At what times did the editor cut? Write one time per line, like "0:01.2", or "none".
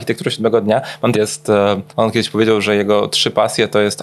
0:01.1
0:01.9